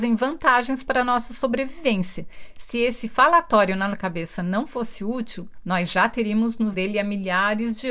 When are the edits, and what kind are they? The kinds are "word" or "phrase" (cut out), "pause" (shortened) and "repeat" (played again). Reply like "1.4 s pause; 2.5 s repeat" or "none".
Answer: 3.9 s word; 6.7 s word